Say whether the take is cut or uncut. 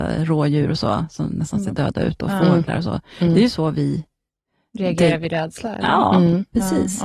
uncut